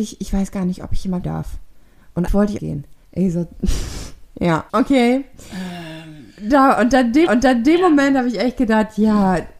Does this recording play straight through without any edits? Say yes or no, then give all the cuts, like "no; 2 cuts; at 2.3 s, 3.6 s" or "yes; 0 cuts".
no; 6 cuts; at 1.2 s, 2.3 s, 2.6 s, 3.0 s, 4.7 s, 7.3 s